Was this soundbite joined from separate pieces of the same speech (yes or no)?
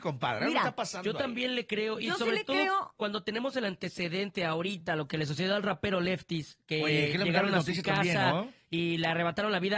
no